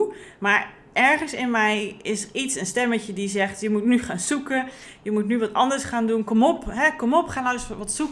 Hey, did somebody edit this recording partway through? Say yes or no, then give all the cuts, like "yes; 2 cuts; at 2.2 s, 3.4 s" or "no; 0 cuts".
no; 0 cuts